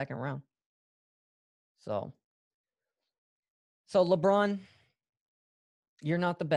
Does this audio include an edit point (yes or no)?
no